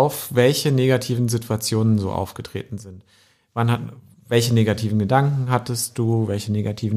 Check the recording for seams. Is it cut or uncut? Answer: uncut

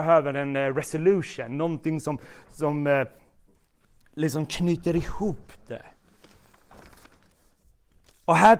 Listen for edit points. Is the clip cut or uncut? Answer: uncut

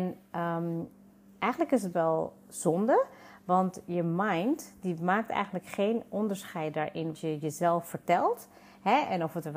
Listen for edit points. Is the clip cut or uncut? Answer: cut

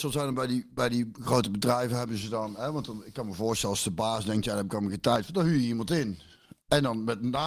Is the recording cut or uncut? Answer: uncut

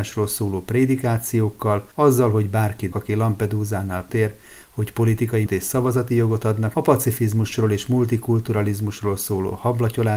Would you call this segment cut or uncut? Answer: cut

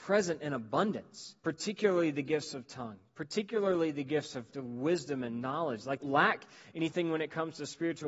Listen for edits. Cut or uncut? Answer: cut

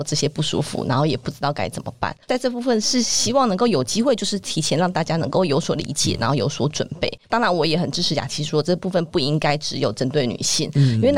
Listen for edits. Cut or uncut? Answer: cut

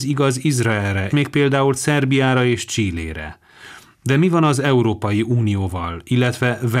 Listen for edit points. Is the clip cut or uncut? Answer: cut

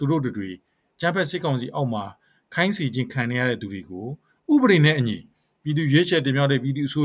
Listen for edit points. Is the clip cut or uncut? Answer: uncut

